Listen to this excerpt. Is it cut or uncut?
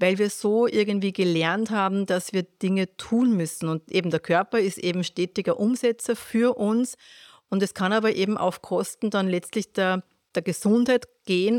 uncut